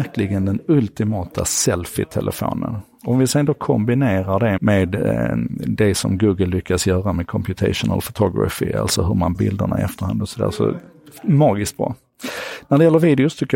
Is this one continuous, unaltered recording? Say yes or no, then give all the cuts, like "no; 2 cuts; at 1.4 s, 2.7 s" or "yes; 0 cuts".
no; 2 cuts; at 4.6 s, 9.3 s